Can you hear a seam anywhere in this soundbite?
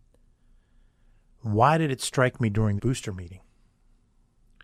yes; 1 cut; at 2.8 s

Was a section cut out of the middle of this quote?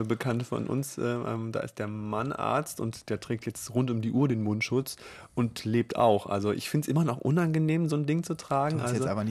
no; 0 cuts

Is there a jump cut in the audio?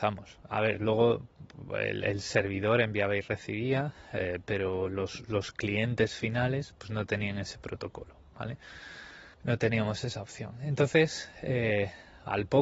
yes; 1 cut; at 9.3 s

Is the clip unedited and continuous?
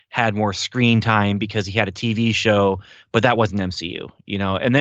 yes; 0 cuts

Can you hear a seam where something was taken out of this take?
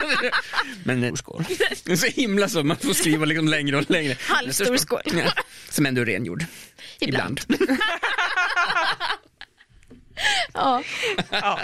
yes; 1 cut; at 1.1 s

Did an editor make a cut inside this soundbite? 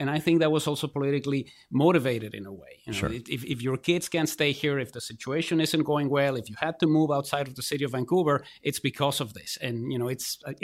no; 0 cuts

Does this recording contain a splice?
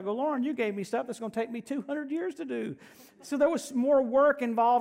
no; 0 cuts

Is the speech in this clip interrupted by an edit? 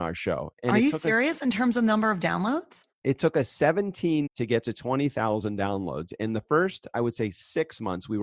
yes; 2 cuts; at 2.9 s, 4.3 s

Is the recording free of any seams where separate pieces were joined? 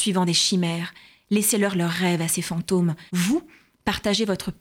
no; 1 cut; at 3.1 s

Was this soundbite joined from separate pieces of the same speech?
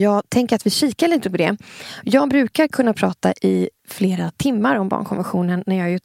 no; 0 cuts

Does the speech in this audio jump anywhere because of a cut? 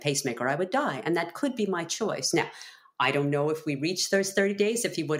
no; 0 cuts

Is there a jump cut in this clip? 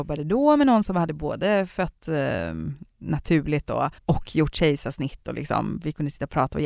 yes; 1 cut; at 4.0 s

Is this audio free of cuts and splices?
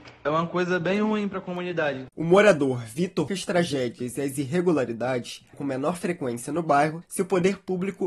no; 3 cuts; at 2.1 s, 3.3 s, 5.5 s

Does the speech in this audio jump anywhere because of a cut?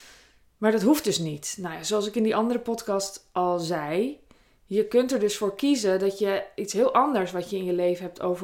no; 0 cuts

